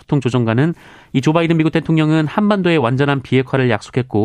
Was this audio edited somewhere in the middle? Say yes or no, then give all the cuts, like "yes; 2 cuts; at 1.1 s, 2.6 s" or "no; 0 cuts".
no; 0 cuts